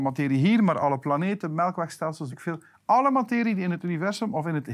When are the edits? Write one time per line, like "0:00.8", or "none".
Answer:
0:02.3

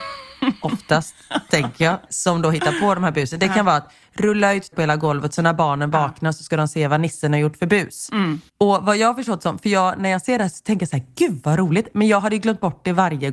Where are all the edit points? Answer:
0:02.1
0:04.7
0:08.5

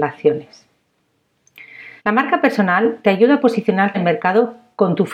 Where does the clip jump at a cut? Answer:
0:02.0
0:03.9

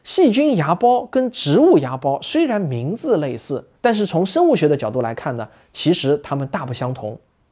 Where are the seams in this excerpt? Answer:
0:03.8

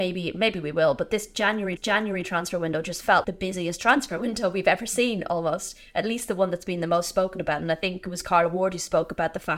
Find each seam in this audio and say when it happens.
0:01.8
0:03.2

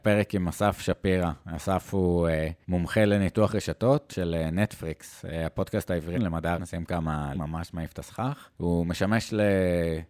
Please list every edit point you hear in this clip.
0:02.6
0:04.1
0:06.1
0:06.6
0:07.3
0:08.5

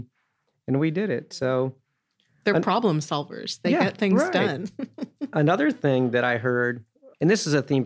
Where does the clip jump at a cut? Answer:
none

